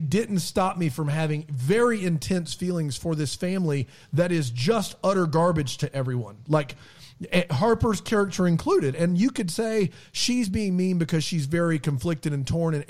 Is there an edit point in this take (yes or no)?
no